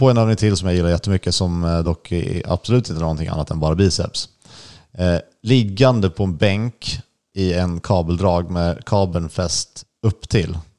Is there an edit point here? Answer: no; 0 cuts

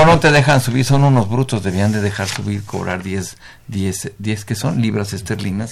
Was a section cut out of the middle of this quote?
no; 0 cuts

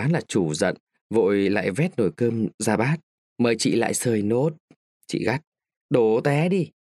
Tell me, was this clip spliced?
yes; 1 cut; at 3.2 s

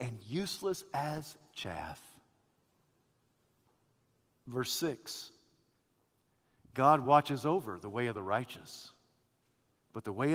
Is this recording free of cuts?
yes; 0 cuts

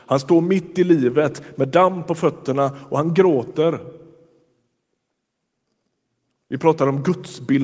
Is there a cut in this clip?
no; 0 cuts

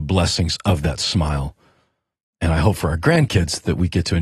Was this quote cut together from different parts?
no; 0 cuts

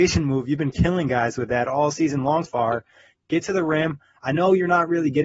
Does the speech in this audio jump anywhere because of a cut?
yes; 1 cut; at 2.5 s

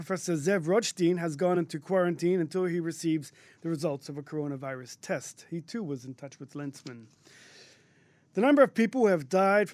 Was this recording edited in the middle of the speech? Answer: no; 0 cuts

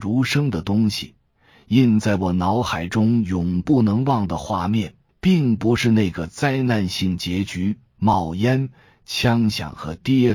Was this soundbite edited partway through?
yes; 1 cut; at 5.1 s

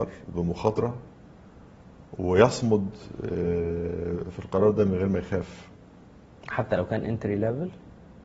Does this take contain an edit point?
no; 0 cuts

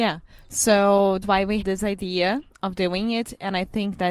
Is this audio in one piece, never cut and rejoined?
no; 2 cuts; at 1.2 s, 1.6 s

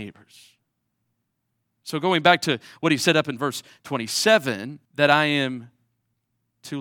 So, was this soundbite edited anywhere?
yes; 1 cut; at 4.8 s

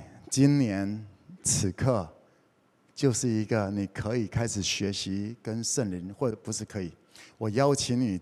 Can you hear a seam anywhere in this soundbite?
no; 0 cuts

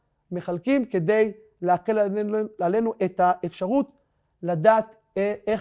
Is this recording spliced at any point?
no; 0 cuts

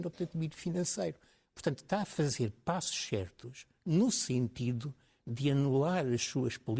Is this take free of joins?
yes; 0 cuts

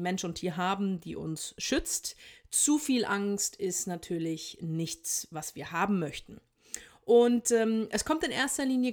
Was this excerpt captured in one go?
yes; 0 cuts

